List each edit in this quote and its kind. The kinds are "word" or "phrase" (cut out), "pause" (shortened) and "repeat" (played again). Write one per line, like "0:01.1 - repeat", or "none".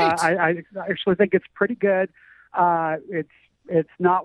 none